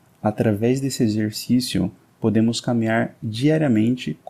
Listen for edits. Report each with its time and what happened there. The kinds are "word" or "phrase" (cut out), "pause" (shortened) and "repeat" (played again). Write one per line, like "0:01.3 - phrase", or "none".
none